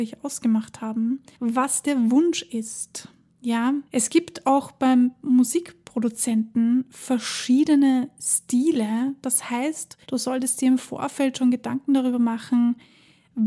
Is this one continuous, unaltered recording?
no; 3 cuts; at 1.3 s, 3.9 s, 10.0 s

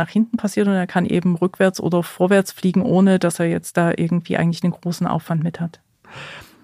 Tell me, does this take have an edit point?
no; 0 cuts

